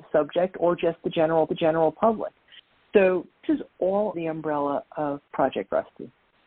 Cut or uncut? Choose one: cut